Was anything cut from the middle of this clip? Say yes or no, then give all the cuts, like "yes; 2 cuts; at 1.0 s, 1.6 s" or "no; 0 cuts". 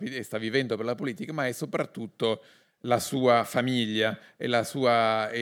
no; 0 cuts